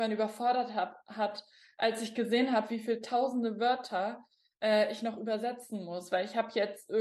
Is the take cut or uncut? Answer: uncut